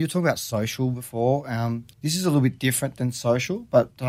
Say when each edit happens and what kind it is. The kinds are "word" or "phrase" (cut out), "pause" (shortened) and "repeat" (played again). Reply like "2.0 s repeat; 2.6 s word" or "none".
1.9 s pause